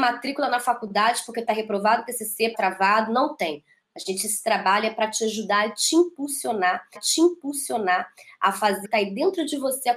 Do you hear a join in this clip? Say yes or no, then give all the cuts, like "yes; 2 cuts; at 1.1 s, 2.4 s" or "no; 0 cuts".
yes; 3 cuts; at 2.5 s, 7.0 s, 8.8 s